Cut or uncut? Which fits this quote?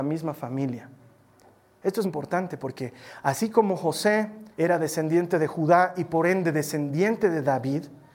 cut